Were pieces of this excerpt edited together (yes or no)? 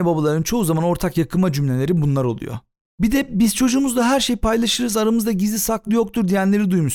no